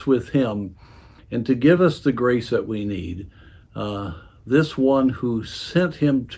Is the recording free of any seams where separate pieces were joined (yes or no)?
yes